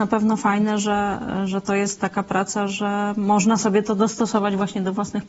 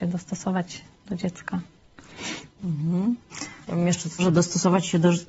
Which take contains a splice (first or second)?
second